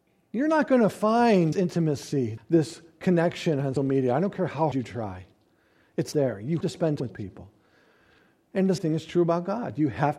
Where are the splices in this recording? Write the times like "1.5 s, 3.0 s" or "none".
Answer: 1.5 s, 2.4 s, 3.8 s, 4.7 s, 6.1 s, 6.6 s, 7.0 s, 8.8 s